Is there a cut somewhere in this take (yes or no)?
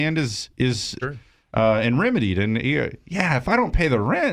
yes